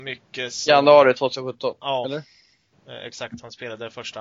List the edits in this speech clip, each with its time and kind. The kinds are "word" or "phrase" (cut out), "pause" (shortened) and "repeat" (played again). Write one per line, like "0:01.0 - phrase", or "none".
none